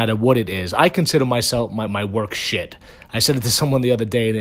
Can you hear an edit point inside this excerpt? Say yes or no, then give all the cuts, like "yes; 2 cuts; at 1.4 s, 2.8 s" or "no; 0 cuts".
no; 0 cuts